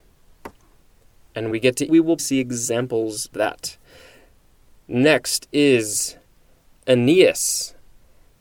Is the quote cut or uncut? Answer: cut